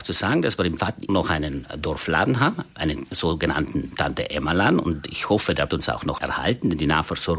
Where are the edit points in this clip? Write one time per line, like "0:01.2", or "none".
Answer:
0:01.1
0:05.7
0:06.2